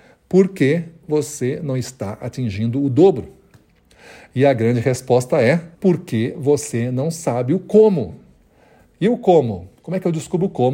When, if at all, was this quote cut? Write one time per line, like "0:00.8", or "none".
0:05.7

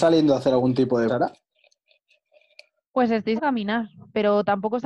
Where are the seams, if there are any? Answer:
0:01.1
0:03.4

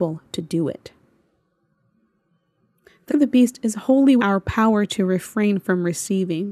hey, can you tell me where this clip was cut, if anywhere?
0:03.1
0:04.2

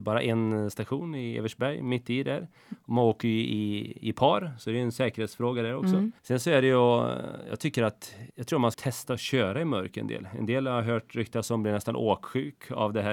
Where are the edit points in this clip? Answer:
0:06.2
0:08.3
0:08.7

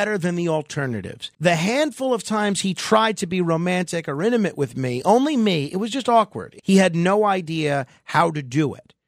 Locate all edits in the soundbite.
0:01.3
0:06.6

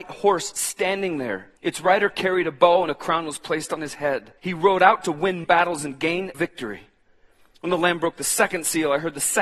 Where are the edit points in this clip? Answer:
0:01.6
0:04.4
0:05.4
0:06.3

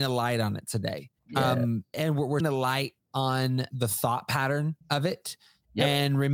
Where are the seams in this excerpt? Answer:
0:01.2
0:01.9
0:02.4
0:03.0
0:03.7
0:04.8

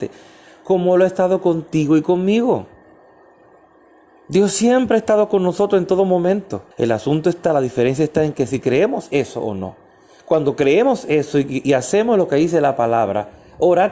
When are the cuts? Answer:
0:06.7

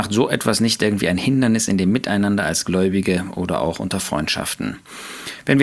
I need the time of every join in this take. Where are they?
none

